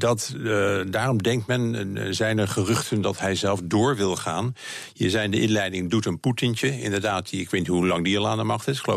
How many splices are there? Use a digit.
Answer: 0